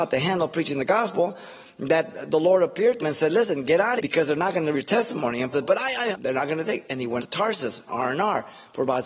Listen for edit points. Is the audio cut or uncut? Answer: cut